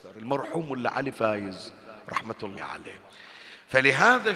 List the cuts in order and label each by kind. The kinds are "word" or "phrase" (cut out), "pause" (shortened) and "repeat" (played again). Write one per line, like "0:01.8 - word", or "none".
0:01.1 - word
0:02.6 - word